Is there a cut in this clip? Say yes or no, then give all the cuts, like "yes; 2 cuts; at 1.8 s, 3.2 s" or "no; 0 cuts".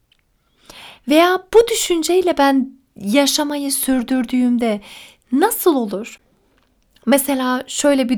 no; 0 cuts